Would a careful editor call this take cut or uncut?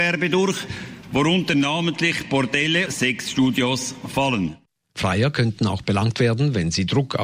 cut